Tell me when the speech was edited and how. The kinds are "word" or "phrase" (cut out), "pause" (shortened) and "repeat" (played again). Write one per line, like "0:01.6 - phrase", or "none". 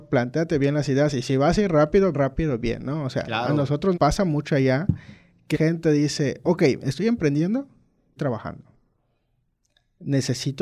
0:02.1 - word
0:03.9 - word
0:05.5 - word
0:08.2 - word